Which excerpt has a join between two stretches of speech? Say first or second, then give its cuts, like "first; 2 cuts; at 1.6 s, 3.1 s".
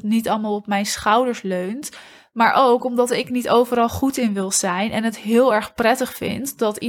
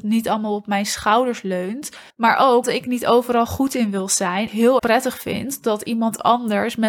second; 4 cuts; at 2.1 s, 2.6 s, 4.5 s, 4.8 s